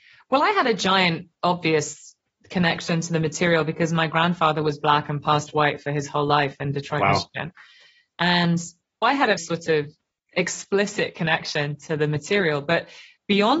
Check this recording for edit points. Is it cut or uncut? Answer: cut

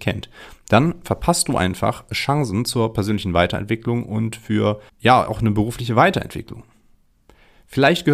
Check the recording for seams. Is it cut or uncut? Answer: cut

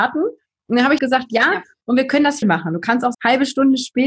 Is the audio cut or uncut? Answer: cut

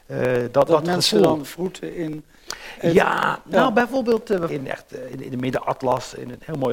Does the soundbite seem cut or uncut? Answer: cut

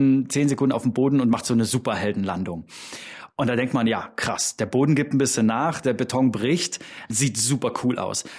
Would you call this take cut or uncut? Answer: uncut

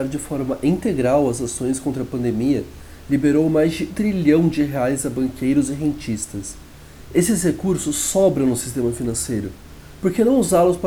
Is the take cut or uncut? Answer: cut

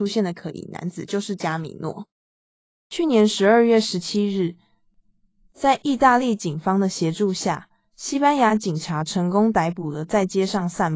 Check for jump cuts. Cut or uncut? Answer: uncut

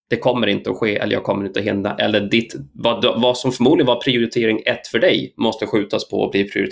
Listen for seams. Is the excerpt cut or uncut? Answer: uncut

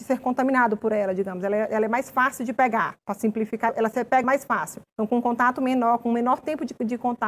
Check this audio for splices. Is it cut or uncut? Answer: cut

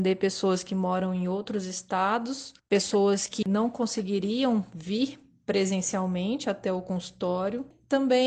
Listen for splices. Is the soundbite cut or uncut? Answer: cut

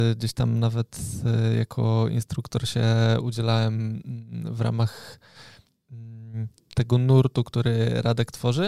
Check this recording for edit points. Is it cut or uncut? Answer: uncut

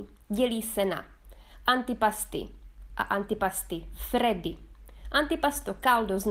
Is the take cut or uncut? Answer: cut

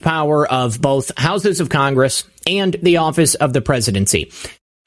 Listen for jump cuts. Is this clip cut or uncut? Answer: uncut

